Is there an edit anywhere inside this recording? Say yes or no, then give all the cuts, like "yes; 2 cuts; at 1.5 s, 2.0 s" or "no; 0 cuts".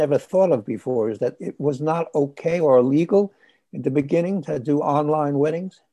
no; 0 cuts